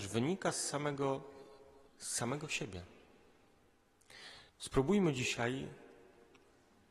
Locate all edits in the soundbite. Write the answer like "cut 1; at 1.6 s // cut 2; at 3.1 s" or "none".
cut 1; at 1.9 s // cut 2; at 4.5 s